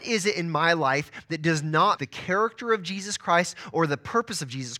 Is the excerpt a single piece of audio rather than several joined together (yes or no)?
no